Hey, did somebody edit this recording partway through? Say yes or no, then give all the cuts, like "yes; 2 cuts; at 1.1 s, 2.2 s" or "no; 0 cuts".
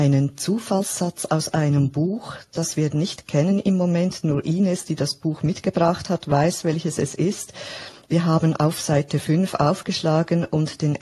no; 0 cuts